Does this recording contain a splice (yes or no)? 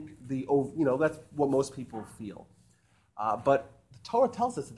no